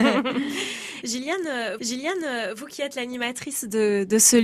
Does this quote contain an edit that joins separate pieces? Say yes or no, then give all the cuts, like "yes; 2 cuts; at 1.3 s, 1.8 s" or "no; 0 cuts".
yes; 1 cut; at 1.8 s